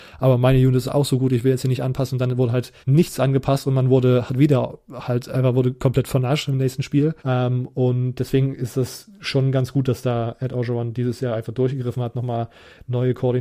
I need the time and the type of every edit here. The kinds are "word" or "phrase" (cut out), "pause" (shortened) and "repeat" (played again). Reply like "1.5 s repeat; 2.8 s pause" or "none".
2.8 s pause; 7.2 s pause